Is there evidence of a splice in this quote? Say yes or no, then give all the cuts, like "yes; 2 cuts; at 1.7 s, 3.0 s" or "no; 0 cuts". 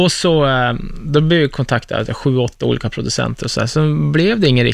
no; 0 cuts